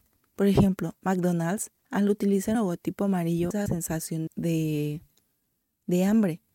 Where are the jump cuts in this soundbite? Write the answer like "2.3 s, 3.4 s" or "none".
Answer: 1.8 s, 2.5 s, 3.7 s, 4.3 s